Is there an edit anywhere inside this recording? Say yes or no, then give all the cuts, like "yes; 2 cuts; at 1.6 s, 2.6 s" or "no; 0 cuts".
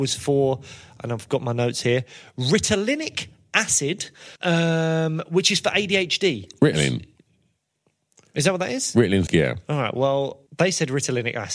yes; 3 cuts; at 4.4 s, 9.3 s, 10.5 s